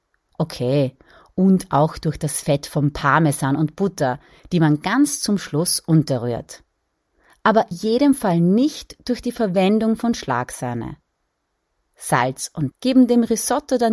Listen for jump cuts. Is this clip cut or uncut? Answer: cut